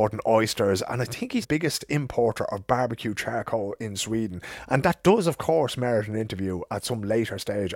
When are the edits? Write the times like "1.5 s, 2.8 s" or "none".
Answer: 1.4 s

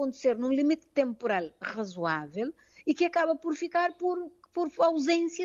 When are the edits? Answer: none

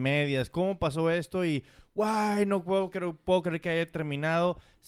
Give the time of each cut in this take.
none

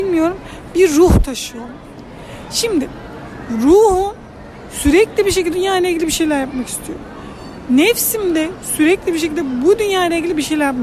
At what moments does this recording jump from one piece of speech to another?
5.5 s

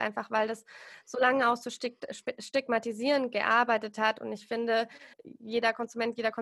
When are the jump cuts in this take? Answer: 5.1 s

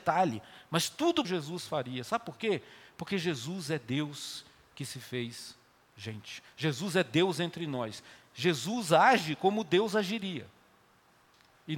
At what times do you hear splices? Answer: 1.2 s

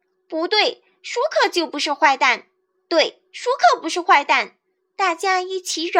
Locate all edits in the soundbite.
none

